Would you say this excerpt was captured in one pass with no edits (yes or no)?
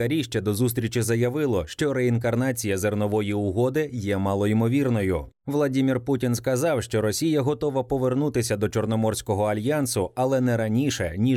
yes